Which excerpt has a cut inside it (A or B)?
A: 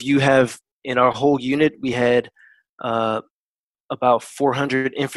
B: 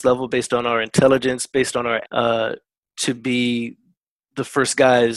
B